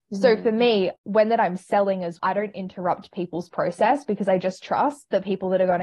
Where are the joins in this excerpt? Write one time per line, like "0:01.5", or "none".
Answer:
0:01.0
0:02.2